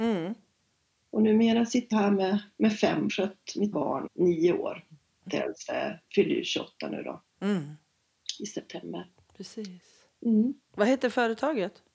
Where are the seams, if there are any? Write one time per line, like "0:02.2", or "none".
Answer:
0:01.9
0:03.1
0:03.7
0:04.1
0:05.3